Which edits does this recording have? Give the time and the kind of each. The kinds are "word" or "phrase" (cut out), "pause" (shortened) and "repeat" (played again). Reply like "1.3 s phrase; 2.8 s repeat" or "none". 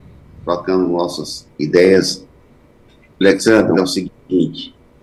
3.7 s word